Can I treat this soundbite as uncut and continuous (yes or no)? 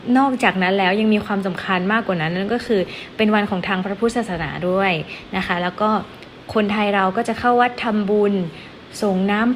yes